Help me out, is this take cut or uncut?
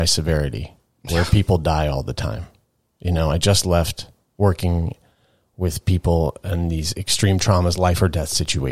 uncut